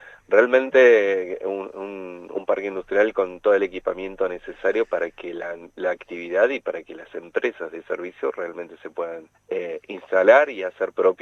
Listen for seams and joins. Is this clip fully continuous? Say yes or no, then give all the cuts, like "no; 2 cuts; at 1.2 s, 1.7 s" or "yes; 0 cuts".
no; 1 cut; at 9.3 s